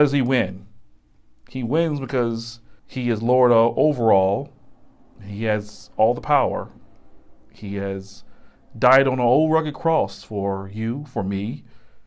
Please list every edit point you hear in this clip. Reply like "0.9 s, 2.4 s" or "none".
2.8 s